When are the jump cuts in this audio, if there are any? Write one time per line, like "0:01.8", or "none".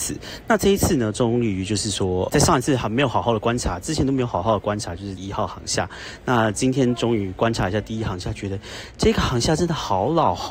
0:02.3
0:05.2